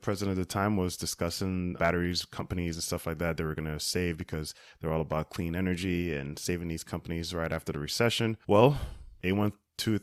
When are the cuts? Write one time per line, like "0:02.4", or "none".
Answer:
0:01.8